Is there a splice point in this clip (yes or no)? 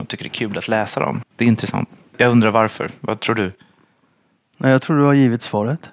yes